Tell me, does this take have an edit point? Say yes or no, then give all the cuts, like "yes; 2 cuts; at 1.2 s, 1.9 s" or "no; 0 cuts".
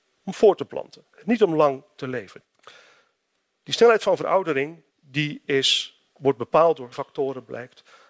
yes; 4 cuts; at 1.1 s, 4.9 s, 6.1 s, 6.9 s